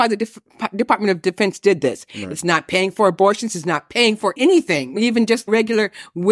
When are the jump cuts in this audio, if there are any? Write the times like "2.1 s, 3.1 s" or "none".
none